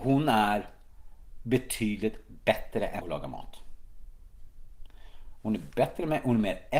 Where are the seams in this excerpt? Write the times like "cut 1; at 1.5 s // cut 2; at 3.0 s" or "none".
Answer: cut 1; at 3.0 s